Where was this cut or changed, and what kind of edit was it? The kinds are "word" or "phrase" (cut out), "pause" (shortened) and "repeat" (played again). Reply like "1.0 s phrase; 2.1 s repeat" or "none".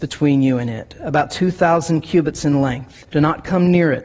3.1 s pause

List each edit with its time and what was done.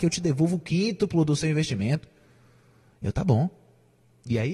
none

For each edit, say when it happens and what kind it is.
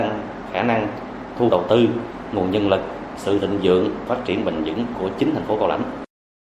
1.5 s word; 4.1 s word

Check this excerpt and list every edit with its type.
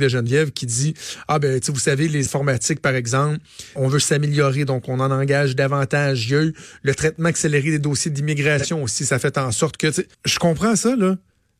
2.3 s word; 3.8 s word; 10.1 s pause

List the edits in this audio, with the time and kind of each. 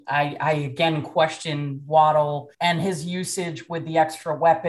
2.5 s pause

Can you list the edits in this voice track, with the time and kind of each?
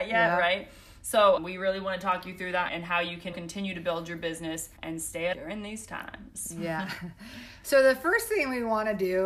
1.4 s word; 2.7 s word; 3.3 s word; 4.8 s pause; 5.3 s word

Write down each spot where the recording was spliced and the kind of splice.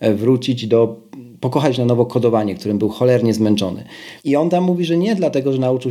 4.2 s pause

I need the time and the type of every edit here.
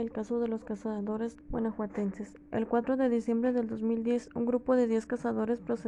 1.4 s pause

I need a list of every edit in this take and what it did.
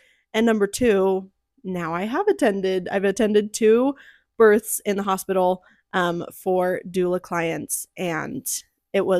none

